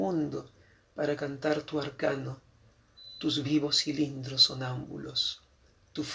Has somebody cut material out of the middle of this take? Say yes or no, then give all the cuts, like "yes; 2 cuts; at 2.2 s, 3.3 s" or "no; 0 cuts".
no; 0 cuts